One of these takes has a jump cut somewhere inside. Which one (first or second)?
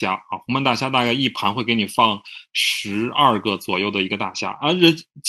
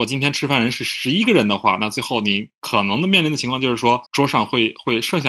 second